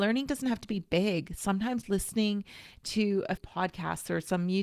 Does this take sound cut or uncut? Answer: cut